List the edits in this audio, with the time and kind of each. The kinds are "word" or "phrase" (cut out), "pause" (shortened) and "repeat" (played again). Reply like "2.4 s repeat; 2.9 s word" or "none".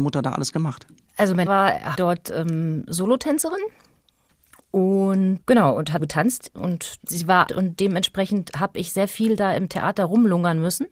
1.5 s word; 1.9 s word; 5.4 s word; 6.0 s word; 7.0 s word; 7.5 s word